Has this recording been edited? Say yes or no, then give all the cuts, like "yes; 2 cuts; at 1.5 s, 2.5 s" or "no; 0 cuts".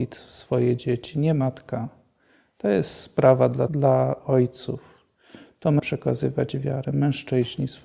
yes; 2 cuts; at 3.7 s, 5.8 s